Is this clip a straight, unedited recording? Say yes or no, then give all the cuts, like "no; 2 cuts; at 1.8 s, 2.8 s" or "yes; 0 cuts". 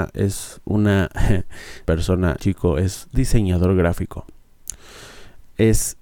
no; 2 cuts; at 1.8 s, 2.4 s